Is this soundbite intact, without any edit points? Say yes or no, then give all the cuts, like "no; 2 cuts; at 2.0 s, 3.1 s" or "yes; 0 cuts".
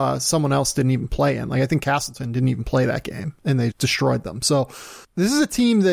no; 1 cut; at 3.7 s